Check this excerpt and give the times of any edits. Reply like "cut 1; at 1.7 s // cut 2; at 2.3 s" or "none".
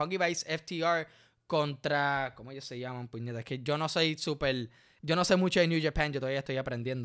none